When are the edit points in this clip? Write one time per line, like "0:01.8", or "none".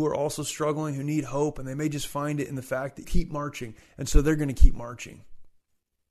0:03.0